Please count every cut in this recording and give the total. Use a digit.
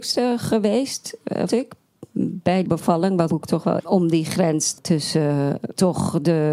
5